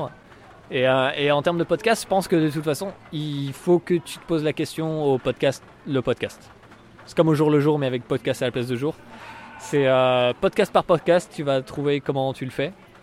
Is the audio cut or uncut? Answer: uncut